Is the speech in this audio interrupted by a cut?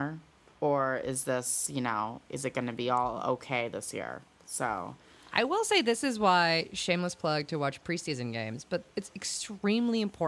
no; 0 cuts

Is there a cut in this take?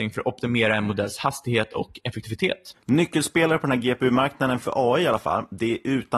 no; 0 cuts

